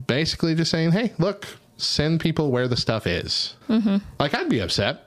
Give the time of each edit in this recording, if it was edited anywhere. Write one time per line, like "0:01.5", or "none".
0:03.6